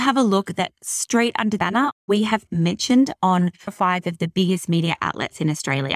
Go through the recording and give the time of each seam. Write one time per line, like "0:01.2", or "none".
0:01.6
0:02.5
0:03.7